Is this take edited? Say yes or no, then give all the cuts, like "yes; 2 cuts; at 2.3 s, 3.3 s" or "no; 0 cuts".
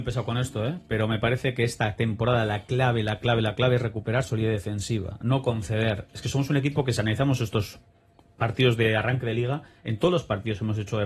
no; 0 cuts